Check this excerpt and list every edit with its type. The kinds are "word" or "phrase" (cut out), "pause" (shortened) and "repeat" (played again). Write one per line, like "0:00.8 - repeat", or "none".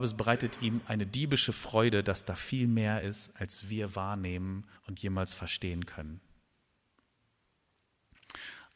0:04.8 - pause